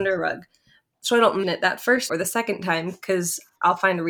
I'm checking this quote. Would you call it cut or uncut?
cut